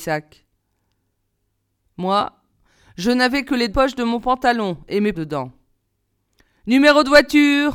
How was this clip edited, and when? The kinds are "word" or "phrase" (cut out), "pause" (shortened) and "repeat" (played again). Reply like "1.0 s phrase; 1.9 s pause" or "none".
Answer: 3.7 s word; 5.1 s word